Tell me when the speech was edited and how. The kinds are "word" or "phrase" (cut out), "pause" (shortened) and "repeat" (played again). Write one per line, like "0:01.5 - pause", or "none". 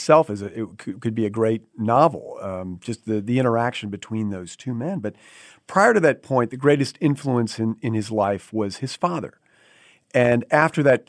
none